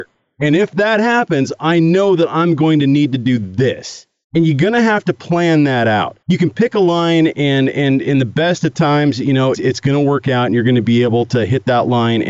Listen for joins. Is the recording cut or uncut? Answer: cut